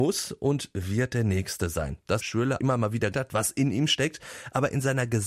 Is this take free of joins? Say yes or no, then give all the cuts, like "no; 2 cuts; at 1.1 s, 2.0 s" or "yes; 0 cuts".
no; 3 cuts; at 2.2 s, 2.6 s, 3.1 s